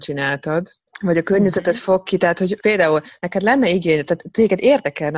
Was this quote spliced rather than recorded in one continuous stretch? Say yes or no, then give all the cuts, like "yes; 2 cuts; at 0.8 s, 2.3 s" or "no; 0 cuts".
no; 0 cuts